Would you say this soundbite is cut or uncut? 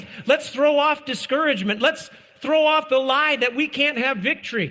uncut